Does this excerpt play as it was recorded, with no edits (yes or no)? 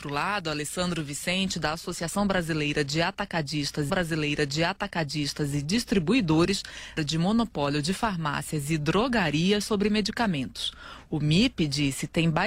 no